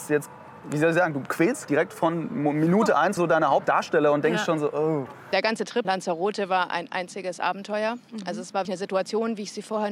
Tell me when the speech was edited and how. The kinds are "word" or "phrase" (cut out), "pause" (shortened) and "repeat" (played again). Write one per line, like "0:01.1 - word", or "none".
0:01.6 - word
0:03.2 - word
0:05.8 - word
0:08.6 - word